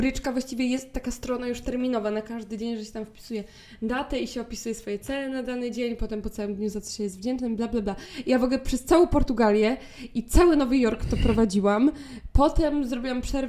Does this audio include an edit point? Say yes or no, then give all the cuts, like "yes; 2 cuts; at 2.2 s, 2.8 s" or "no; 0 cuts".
no; 0 cuts